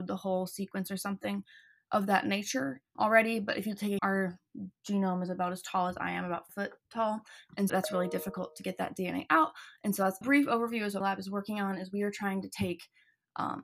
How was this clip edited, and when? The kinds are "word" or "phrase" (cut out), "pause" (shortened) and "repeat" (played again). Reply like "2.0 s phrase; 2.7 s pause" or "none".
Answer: 2.9 s word; 4.0 s word; 6.5 s word; 7.7 s word; 10.2 s word; 11.0 s word